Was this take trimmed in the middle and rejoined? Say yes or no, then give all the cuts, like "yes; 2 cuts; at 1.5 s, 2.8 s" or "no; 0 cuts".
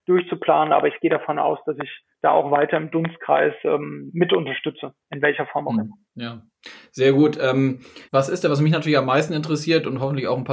yes; 3 cuts; at 2.1 s, 6.1 s, 8.0 s